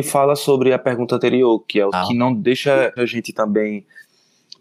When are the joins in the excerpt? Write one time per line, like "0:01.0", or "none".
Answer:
0:01.9
0:03.0